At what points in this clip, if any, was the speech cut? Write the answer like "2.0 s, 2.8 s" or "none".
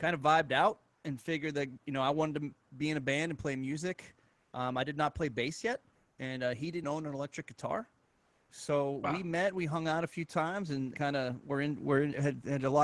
6.8 s, 10.9 s